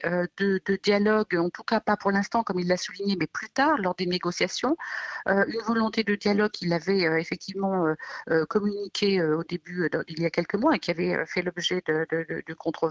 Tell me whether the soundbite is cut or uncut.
uncut